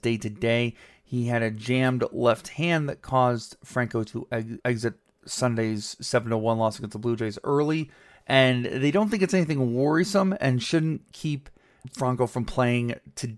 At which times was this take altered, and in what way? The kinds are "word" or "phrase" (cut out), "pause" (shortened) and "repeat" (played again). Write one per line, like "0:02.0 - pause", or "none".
none